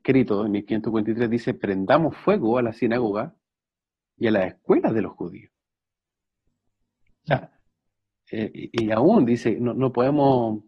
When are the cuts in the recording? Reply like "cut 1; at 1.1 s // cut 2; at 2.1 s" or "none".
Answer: none

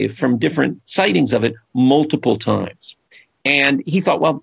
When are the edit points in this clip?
none

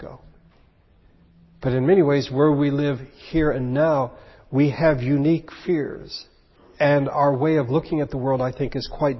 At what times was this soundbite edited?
cut 1; at 6.6 s

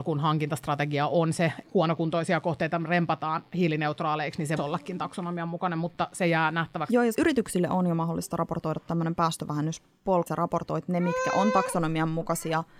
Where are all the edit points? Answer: cut 1; at 1.6 s // cut 2; at 4.6 s // cut 3; at 7.1 s // cut 4; at 10.3 s

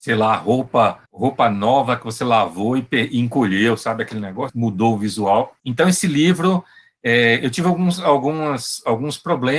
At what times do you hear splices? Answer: cut 1; at 1.1 s // cut 2; at 4.5 s // cut 3; at 5.6 s

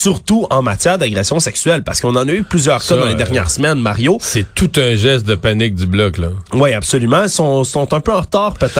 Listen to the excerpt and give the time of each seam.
none

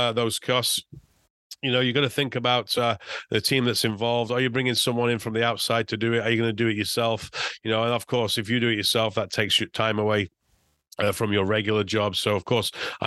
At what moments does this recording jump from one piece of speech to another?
none

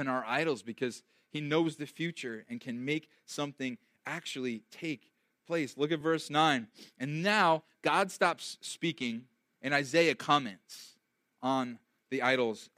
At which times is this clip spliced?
none

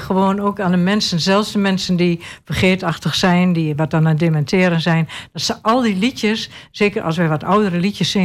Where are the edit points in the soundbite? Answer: none

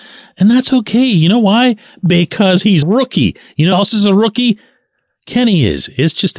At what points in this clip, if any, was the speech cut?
cut 1; at 2.8 s // cut 2; at 3.7 s

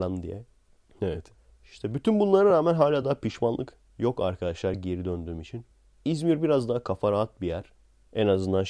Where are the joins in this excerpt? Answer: none

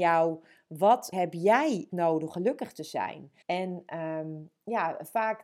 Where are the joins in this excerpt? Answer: cut 1; at 1.1 s // cut 2; at 1.9 s // cut 3; at 2.3 s // cut 4; at 3.4 s

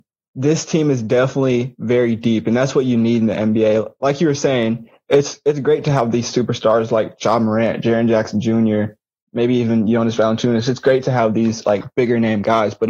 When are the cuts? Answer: none

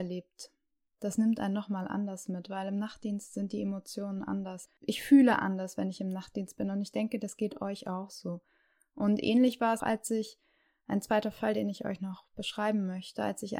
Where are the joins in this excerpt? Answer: cut 1; at 9.8 s

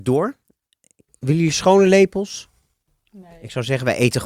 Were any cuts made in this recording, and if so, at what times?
none

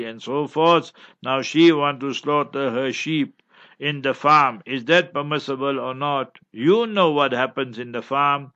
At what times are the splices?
none

